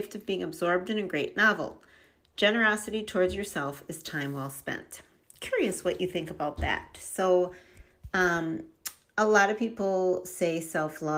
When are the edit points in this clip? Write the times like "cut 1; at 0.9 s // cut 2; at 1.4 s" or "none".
none